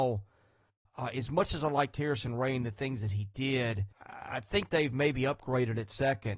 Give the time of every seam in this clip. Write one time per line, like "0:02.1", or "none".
0:03.9
0:04.7